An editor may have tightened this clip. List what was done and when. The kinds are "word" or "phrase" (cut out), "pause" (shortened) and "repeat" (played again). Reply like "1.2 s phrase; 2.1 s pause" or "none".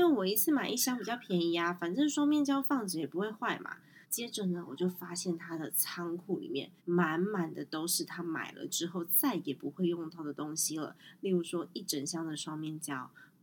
4.0 s pause; 6.8 s pause